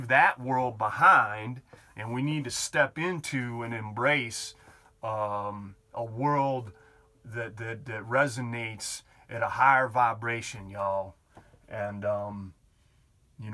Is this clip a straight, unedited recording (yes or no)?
yes